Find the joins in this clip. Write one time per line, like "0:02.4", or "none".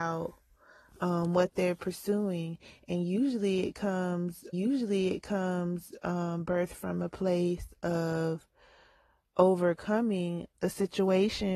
0:04.5
0:10.5